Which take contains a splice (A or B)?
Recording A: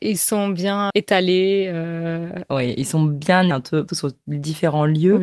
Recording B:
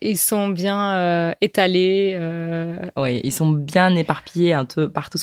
A